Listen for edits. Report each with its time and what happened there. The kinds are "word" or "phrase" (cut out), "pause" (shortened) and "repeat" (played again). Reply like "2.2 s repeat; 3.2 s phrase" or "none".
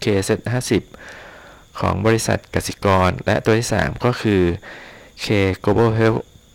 none